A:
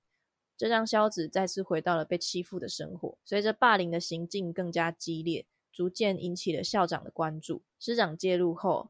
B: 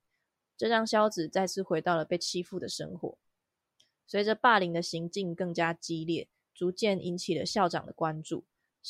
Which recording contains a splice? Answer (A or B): A